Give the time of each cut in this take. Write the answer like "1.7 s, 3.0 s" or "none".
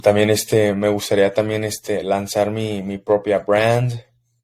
none